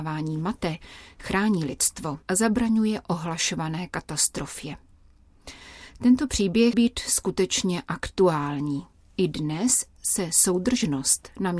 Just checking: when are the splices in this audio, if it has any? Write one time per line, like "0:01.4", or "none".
0:02.2
0:06.7